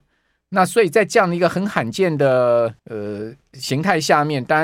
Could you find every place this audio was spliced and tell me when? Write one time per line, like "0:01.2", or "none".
0:02.8